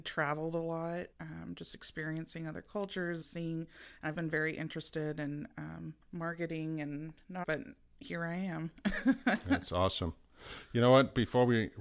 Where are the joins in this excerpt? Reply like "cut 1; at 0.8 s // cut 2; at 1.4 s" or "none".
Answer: cut 1; at 1.1 s // cut 2; at 3.2 s // cut 3; at 4.1 s // cut 4; at 6.0 s // cut 5; at 7.4 s